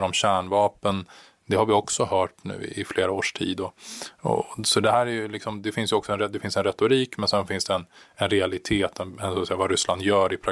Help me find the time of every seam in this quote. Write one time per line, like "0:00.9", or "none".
none